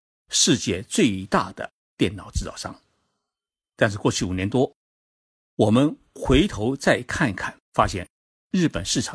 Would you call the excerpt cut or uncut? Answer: cut